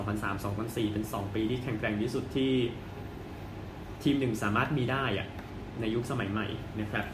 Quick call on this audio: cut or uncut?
uncut